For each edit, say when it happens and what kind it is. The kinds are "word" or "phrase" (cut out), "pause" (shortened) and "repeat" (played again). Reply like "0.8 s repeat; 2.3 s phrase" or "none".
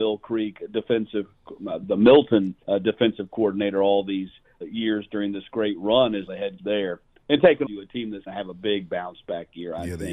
2.6 s pause; 4.6 s word; 6.3 s word; 6.6 s word; 7.7 s phrase; 8.3 s word